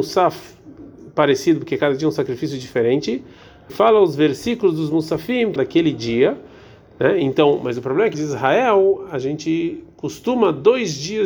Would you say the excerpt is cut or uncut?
cut